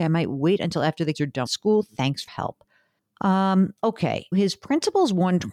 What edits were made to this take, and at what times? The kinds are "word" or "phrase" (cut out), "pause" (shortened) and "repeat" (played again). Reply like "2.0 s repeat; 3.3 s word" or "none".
1.1 s word; 1.5 s word; 2.3 s word; 4.3 s word